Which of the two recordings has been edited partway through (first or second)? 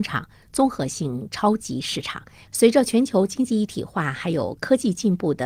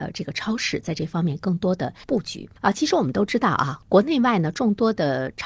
second